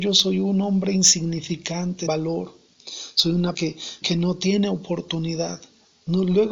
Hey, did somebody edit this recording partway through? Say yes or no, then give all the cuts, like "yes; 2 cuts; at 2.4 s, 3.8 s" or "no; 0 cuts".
yes; 3 cuts; at 2.1 s, 3.5 s, 4.0 s